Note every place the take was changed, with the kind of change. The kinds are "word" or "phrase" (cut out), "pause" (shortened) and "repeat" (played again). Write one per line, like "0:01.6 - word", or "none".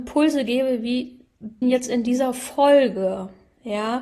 0:01.6 - word